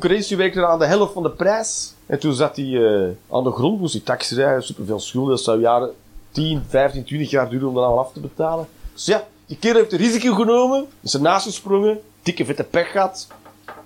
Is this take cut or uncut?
cut